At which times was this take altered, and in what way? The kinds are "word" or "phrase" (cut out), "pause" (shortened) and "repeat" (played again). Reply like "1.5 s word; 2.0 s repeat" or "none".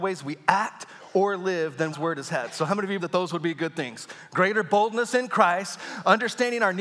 1.9 s phrase; 3.0 s word

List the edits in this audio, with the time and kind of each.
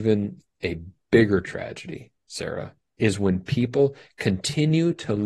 none

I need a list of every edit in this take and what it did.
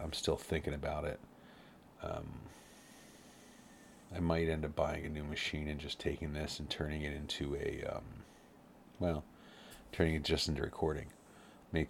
none

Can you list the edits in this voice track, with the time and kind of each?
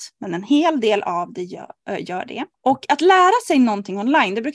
2.5 s pause

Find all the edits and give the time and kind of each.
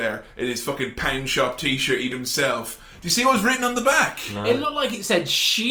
2.1 s word

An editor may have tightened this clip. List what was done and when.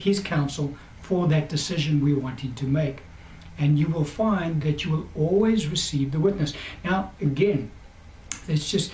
none

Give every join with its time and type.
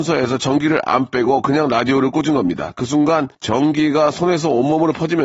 3.3 s pause

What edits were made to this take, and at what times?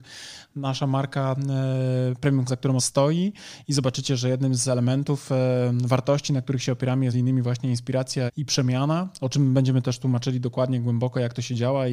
2.5 s word; 2.8 s word; 7.1 s word; 8.3 s word

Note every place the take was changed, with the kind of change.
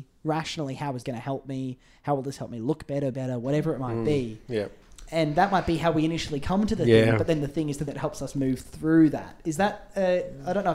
1.0 s word; 3.1 s word; 7.9 s word

